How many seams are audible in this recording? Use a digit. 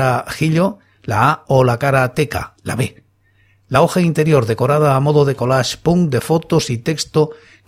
0